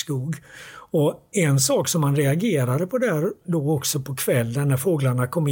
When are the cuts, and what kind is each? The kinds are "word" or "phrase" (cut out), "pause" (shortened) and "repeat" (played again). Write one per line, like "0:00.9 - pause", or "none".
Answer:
none